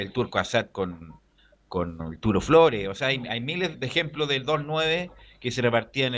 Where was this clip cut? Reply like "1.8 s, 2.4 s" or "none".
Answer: 3.7 s